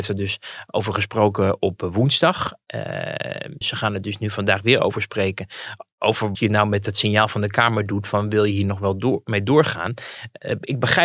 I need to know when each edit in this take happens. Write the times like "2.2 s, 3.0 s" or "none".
3.6 s, 6.4 s

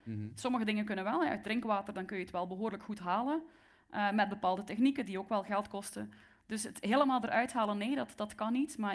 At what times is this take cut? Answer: none

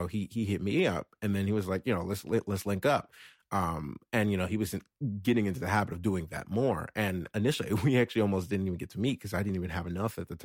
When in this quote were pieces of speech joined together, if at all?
none

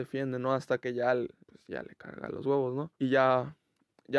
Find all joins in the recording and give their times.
1.4 s, 2.9 s

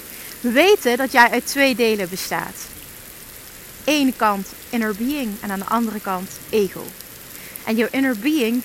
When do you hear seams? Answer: none

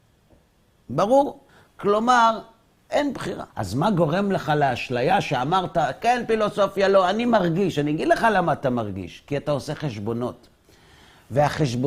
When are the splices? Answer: 1.5 s, 3.5 s

